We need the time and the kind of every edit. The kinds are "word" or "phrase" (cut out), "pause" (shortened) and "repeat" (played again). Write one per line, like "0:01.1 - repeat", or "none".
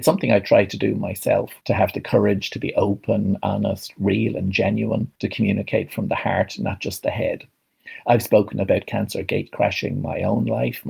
0:01.6 - pause
0:05.2 - pause